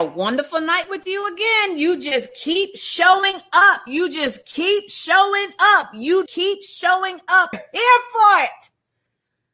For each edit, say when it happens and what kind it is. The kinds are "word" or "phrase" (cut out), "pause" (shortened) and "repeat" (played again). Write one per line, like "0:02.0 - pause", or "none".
0:06.3 - word
0:07.5 - phrase